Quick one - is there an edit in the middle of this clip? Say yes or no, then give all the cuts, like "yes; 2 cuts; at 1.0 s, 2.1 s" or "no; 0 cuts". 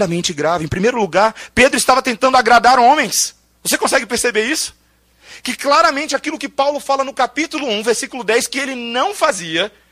no; 0 cuts